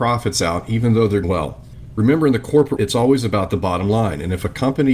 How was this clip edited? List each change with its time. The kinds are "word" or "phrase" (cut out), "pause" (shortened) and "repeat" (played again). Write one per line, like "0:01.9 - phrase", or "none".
0:01.2 - word
0:02.8 - word